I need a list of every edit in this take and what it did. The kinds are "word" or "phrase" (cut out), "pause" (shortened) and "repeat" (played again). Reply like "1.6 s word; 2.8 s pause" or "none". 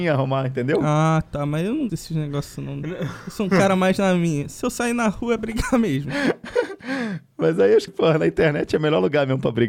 1.9 s word; 5.4 s word; 7.9 s word